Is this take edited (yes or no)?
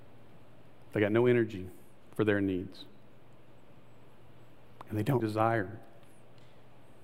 yes